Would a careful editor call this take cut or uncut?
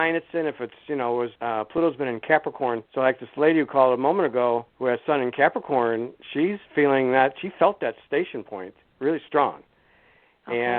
cut